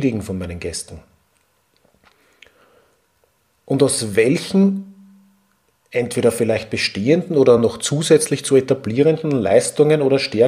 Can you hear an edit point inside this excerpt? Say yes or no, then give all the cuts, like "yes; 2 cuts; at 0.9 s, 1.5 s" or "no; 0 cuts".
no; 0 cuts